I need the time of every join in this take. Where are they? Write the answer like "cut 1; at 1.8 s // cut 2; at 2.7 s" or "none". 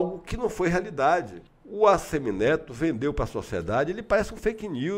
cut 1; at 1.5 s